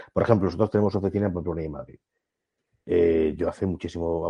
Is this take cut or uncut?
uncut